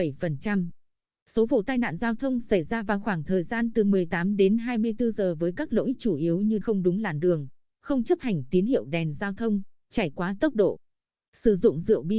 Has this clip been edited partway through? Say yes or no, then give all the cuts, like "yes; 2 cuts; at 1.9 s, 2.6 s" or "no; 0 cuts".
yes; 2 cuts; at 6.6 s, 7.6 s